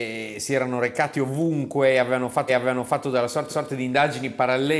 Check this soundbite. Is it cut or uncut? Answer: cut